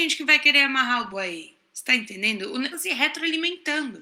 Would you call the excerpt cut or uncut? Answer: cut